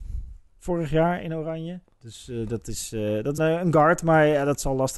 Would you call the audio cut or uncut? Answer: cut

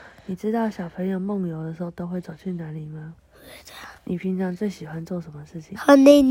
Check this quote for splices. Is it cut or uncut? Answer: cut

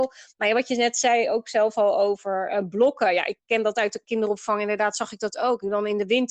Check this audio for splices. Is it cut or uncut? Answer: uncut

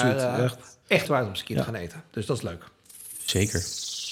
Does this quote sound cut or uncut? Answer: cut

